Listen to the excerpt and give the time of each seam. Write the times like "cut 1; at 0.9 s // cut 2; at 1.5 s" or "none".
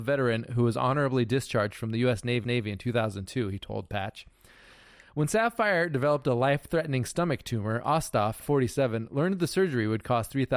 cut 1; at 2.4 s // cut 2; at 8.4 s